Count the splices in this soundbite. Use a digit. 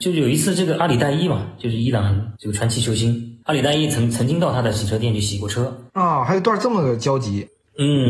2